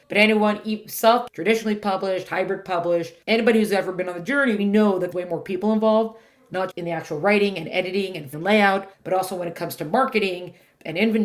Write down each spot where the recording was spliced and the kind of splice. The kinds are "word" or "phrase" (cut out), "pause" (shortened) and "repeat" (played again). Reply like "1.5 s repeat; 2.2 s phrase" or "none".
1.3 s word; 3.2 s pause; 4.6 s word; 5.1 s word; 6.7 s word; 8.3 s word; 8.9 s pause